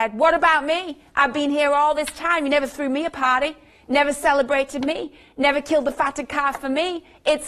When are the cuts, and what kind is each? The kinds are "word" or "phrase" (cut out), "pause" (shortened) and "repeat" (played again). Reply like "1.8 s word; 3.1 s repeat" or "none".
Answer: none